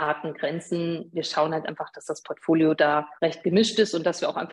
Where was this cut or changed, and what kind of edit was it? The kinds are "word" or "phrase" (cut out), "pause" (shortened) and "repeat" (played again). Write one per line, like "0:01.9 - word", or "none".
0:03.2 - pause